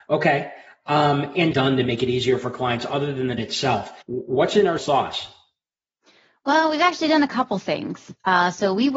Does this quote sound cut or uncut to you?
cut